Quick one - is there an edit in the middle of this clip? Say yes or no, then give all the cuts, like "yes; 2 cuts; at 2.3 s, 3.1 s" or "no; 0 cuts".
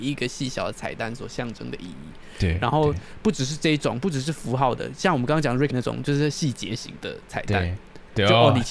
yes; 1 cut; at 5.7 s